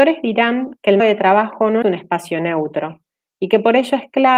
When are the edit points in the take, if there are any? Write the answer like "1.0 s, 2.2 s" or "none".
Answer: 1.0 s, 1.8 s